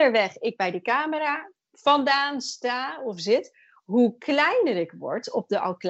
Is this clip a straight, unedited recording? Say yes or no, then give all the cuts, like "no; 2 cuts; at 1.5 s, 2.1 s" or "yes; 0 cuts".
yes; 0 cuts